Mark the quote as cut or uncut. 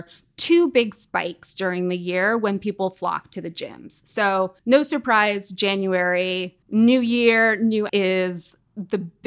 cut